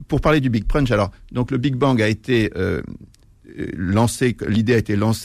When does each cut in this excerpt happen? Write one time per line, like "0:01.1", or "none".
none

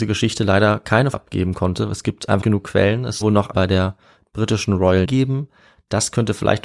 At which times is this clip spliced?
0:01.1
0:02.4
0:03.2
0:03.5
0:05.0

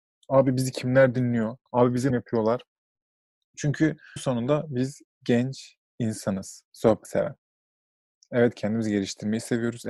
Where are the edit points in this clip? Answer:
0:01.7
0:02.1
0:04.2
0:05.1
0:07.0

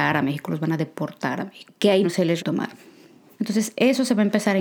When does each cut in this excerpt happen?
0:02.0
0:02.4

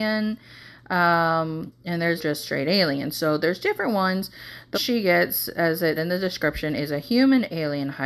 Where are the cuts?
0:02.2
0:04.7
0:06.0

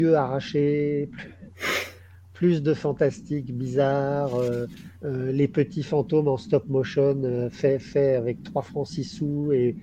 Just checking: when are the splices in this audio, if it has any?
0:04.9

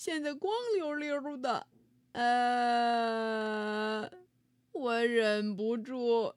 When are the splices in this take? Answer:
none

